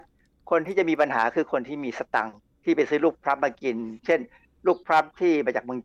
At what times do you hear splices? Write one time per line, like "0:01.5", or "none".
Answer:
none